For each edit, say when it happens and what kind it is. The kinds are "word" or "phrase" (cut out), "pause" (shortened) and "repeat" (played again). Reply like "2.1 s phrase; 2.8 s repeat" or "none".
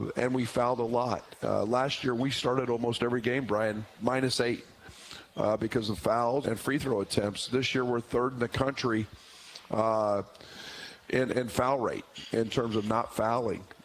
6.4 s word